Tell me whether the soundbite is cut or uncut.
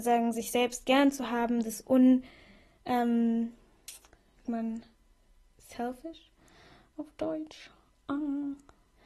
cut